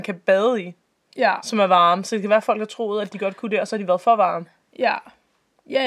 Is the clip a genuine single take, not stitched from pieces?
yes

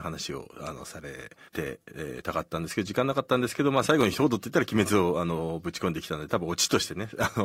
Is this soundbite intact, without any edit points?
no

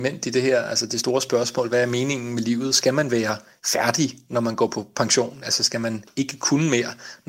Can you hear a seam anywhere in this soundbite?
no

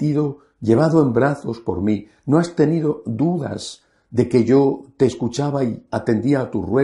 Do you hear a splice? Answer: no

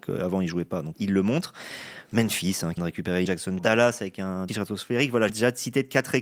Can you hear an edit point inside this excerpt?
yes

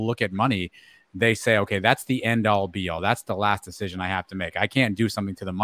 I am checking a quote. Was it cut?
no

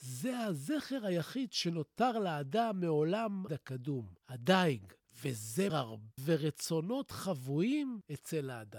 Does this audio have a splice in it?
yes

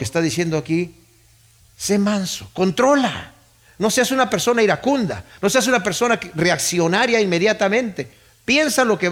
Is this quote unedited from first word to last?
yes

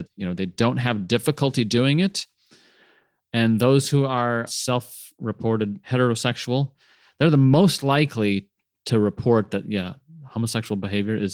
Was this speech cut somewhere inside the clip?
no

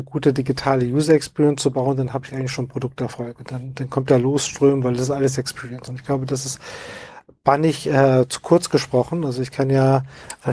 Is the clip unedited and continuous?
yes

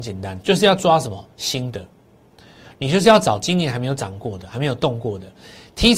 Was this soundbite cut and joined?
no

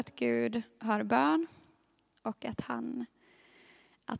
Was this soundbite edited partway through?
no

